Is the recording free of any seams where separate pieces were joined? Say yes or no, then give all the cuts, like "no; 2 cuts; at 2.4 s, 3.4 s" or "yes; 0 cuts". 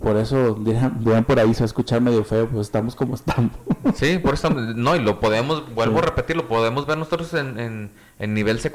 yes; 0 cuts